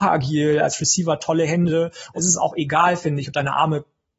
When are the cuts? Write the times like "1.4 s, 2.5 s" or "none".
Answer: 2.2 s